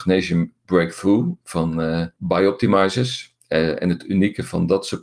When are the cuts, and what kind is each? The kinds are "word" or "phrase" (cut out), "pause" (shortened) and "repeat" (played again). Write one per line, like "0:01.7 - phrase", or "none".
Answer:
0:02.2 - pause